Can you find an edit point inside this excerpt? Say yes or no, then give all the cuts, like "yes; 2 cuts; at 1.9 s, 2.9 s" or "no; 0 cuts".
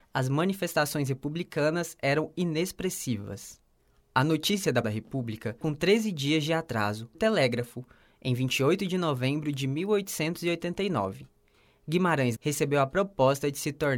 yes; 4 cuts; at 4.8 s, 5.6 s, 7.1 s, 12.4 s